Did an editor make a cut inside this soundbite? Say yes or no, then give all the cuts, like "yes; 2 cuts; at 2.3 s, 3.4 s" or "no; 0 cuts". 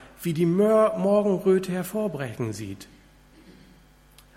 no; 0 cuts